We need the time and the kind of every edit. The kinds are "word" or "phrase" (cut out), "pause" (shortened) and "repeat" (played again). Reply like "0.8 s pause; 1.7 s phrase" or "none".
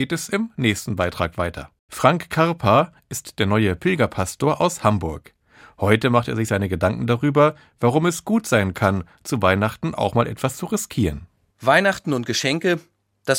none